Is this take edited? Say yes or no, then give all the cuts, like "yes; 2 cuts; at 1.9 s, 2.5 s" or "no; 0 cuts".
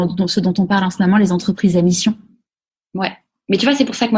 no; 0 cuts